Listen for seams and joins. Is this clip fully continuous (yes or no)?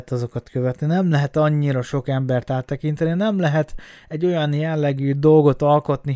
yes